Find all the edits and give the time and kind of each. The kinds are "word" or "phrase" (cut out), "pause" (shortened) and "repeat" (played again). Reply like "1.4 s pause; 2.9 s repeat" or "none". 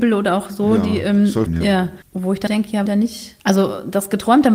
1.5 s word; 2.0 s pause; 2.5 s word; 2.9 s phrase; 3.4 s pause